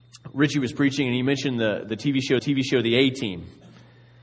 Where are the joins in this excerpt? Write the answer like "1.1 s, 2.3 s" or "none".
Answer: 2.4 s